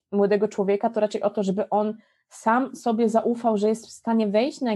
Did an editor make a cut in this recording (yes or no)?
no